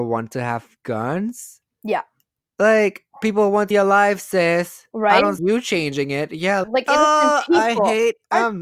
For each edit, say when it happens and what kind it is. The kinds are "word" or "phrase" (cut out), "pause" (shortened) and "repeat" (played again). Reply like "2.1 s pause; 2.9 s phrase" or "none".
3.7 s word; 5.4 s word; 6.6 s word